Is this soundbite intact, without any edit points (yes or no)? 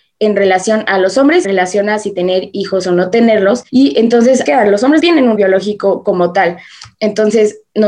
no